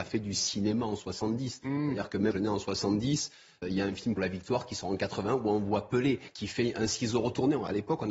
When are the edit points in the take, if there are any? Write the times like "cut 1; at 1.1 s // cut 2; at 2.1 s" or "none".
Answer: cut 1; at 2.3 s // cut 2; at 3.6 s // cut 3; at 4.2 s

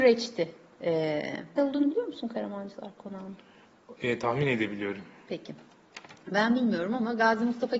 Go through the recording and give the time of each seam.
cut 1; at 1.6 s

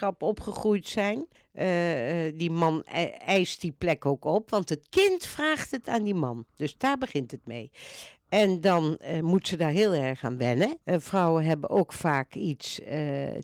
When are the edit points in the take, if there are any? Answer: cut 1; at 1.4 s // cut 2; at 10.8 s

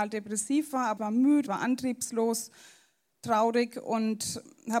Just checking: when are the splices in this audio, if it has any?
cut 1; at 1.0 s // cut 2; at 1.5 s

